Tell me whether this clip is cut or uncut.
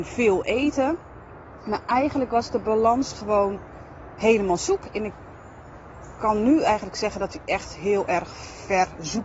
uncut